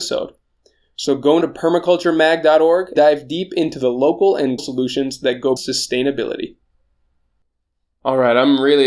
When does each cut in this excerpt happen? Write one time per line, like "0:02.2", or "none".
0:01.4
0:03.0
0:04.6
0:05.6